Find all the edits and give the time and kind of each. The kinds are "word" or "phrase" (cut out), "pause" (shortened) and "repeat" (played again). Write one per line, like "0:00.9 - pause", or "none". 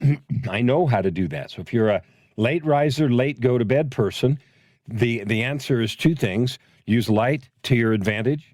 none